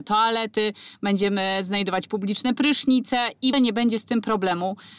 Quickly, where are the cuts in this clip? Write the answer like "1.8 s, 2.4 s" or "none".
3.5 s